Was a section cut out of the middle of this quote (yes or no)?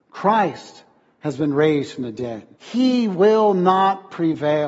yes